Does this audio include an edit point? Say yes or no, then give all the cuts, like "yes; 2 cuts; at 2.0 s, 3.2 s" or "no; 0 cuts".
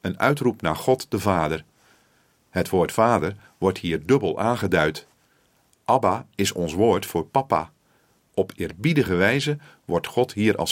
no; 0 cuts